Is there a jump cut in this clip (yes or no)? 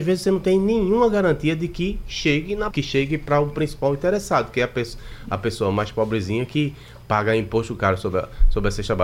yes